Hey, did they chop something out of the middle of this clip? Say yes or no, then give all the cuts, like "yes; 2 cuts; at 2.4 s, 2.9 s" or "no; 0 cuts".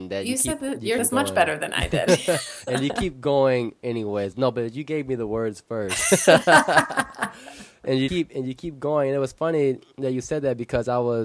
yes; 2 cuts; at 1.0 s, 8.1 s